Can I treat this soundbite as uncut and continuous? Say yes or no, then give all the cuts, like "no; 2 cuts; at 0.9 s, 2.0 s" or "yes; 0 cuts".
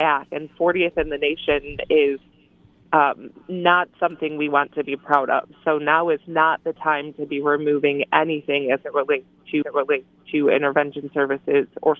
no; 1 cut; at 9.6 s